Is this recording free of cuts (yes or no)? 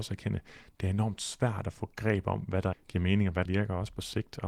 no